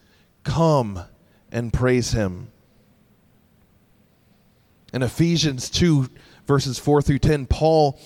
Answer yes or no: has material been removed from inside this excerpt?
no